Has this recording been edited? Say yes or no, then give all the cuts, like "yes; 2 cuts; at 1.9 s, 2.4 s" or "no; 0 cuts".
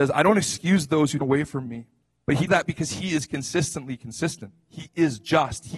yes; 3 cuts; at 1.2 s, 2.0 s, 2.5 s